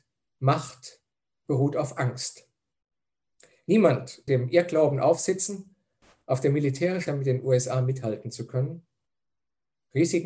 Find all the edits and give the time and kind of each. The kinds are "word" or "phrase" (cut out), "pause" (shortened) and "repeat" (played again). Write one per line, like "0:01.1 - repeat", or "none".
0:04.3 - word
0:07.1 - word